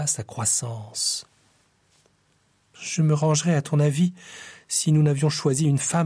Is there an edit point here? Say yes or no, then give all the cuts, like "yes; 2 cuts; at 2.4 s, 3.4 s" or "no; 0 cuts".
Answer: no; 0 cuts